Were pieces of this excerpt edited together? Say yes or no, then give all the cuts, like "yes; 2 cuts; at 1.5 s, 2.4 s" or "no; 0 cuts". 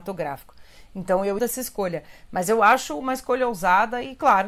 yes; 1 cut; at 1.4 s